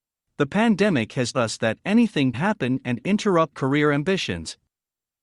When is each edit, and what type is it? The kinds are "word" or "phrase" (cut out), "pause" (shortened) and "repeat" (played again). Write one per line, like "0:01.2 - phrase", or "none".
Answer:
0:01.3 - word
0:02.3 - word
0:03.5 - word